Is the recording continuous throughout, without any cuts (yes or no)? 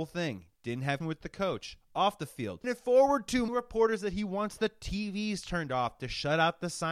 no